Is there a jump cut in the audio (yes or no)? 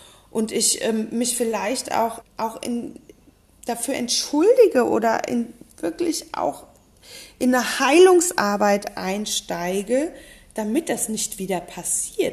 yes